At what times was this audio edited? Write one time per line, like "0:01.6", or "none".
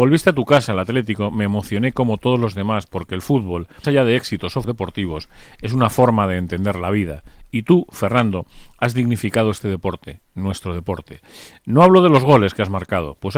0:03.8
0:04.6